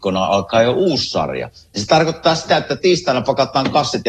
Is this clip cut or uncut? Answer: uncut